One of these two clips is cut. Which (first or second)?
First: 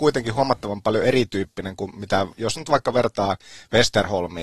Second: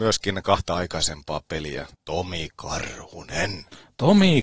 second